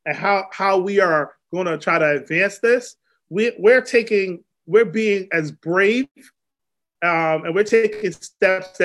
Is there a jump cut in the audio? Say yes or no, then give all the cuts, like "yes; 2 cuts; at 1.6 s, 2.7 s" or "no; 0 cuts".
no; 0 cuts